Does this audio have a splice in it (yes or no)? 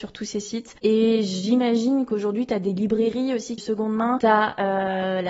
yes